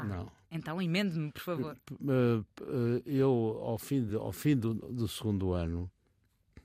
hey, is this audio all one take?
yes; 0 cuts

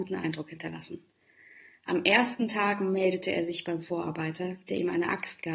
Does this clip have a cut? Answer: no; 0 cuts

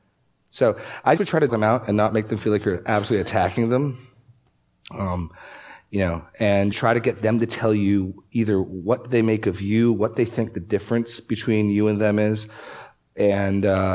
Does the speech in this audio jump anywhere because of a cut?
yes; 3 cuts; at 1.2 s, 1.5 s, 6.7 s

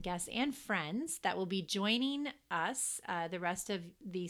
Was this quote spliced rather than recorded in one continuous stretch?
no; 0 cuts

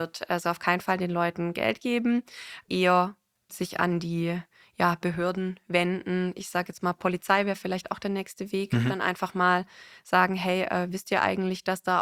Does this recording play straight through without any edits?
yes; 0 cuts

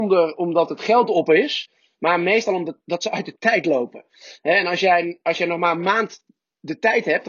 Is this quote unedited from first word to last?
yes; 0 cuts

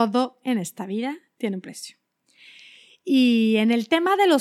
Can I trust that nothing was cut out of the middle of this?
yes; 0 cuts

